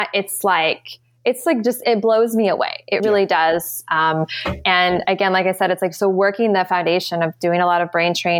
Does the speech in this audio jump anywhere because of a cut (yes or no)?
yes